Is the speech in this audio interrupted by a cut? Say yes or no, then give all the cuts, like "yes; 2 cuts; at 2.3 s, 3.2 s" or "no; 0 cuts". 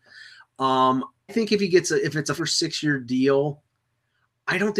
yes; 2 cuts; at 1.3 s, 2.4 s